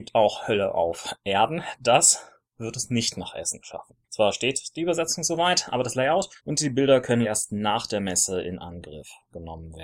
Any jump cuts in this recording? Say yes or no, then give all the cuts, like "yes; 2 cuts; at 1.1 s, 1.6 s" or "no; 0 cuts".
yes; 3 cuts; at 4.0 s, 6.4 s, 7.2 s